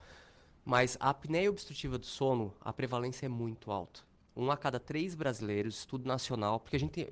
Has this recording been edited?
no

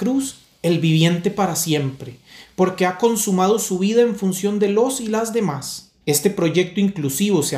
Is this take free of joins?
no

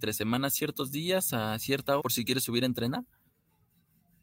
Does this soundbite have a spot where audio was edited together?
yes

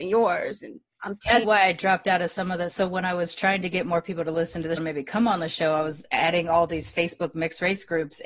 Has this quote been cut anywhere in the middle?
yes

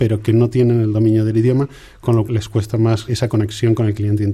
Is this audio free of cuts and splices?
no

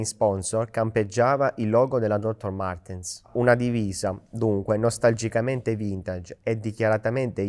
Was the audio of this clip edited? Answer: no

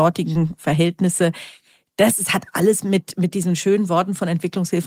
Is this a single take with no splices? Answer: yes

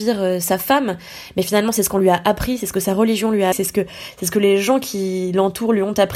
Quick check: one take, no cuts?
no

